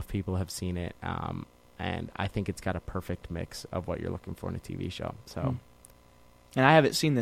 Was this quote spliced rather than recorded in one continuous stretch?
no; 0 cuts

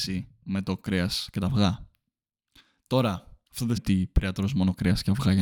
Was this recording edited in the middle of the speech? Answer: yes; 2 cuts; at 3.5 s, 3.8 s

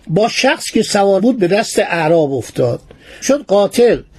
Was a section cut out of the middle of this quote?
yes; 2 cuts; at 1.2 s, 3.2 s

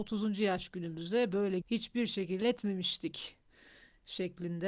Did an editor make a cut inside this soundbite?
yes; 2 cuts; at 1.6 s, 2.4 s

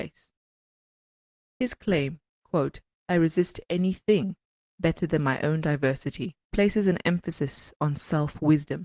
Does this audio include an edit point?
yes; 1 cut; at 6.4 s

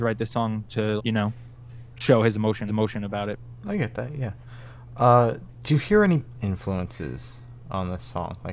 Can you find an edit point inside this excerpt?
yes; 3 cuts; at 1.0 s, 2.7 s, 6.3 s

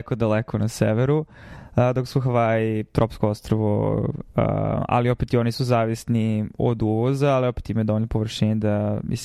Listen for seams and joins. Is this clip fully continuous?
yes; 0 cuts

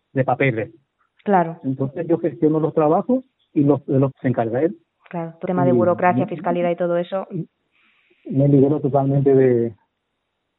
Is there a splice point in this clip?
yes; 2 cuts; at 4.1 s, 5.5 s

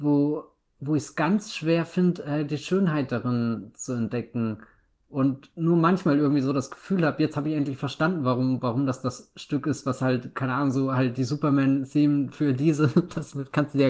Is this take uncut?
yes; 0 cuts

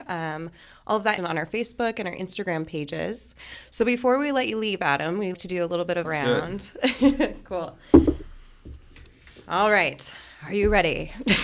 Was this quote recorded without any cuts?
no; 3 cuts; at 1.2 s, 5.3 s, 6.0 s

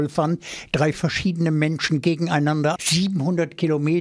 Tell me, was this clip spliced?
yes; 2 cuts; at 0.9 s, 2.8 s

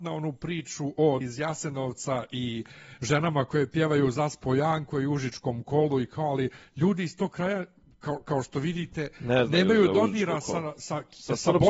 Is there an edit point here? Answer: yes; 1 cut; at 1.2 s

